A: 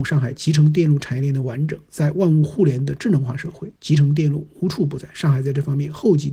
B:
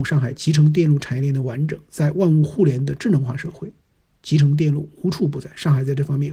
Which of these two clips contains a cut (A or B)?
A